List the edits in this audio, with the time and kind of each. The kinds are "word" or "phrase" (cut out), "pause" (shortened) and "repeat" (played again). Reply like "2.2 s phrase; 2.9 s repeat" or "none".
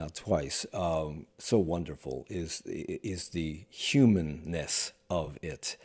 1.3 s pause